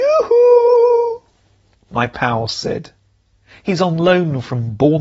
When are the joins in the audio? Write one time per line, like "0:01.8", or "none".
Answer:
none